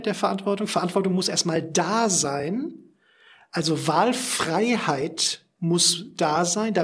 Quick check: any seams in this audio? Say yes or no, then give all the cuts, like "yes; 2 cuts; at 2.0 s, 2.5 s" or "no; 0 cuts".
no; 0 cuts